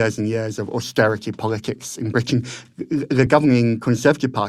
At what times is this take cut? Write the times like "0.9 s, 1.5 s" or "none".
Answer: none

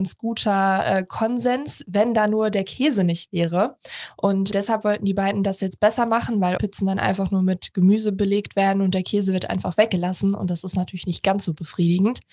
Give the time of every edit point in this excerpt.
4.5 s, 6.6 s

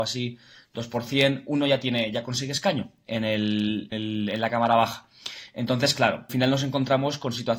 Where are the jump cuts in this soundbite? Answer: 3.9 s, 6.3 s

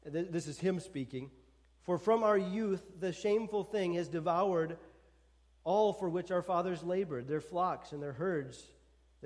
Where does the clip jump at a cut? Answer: none

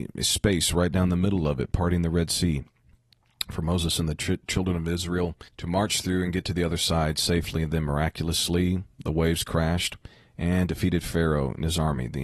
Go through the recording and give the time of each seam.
5.5 s

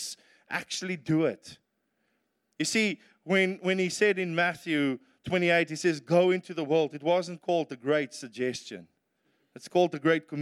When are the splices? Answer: none

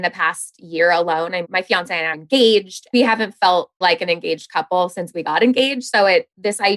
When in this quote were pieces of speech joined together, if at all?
1.4 s, 2.1 s, 2.9 s, 3.8 s

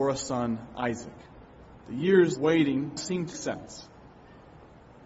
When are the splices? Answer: 1.8 s, 2.4 s, 3.0 s, 3.3 s

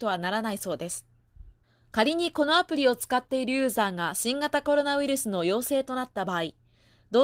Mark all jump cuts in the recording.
1.6 s

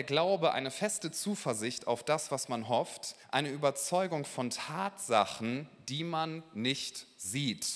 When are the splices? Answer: 3.2 s

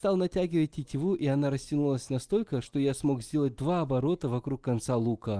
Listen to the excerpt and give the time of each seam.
none

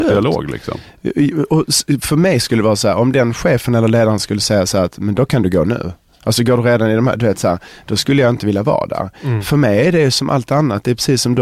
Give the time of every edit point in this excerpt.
none

